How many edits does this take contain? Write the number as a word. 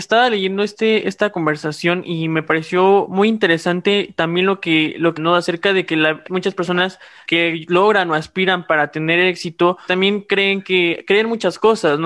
four